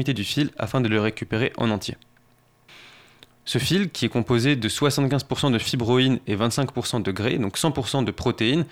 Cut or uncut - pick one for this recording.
uncut